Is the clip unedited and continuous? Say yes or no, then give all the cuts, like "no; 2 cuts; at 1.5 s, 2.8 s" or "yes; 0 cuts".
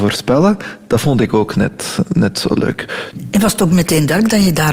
yes; 0 cuts